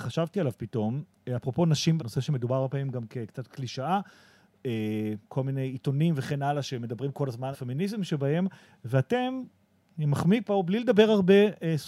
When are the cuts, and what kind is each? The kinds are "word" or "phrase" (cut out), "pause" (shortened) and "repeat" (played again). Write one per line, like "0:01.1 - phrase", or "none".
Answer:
0:02.0 - word
0:07.5 - word